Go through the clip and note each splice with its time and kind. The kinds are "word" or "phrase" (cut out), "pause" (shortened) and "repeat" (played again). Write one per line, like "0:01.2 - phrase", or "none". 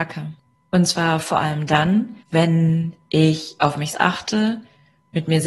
0:02.2 - pause
0:03.9 - word